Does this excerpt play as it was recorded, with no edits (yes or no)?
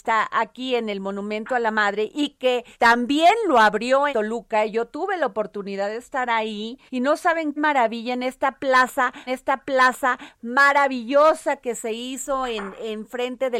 no